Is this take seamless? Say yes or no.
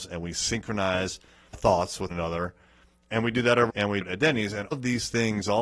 no